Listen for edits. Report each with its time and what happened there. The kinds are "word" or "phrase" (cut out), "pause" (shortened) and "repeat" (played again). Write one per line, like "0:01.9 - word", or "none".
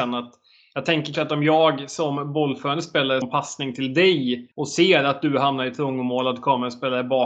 0:01.1 - word
0:03.2 - word
0:04.5 - pause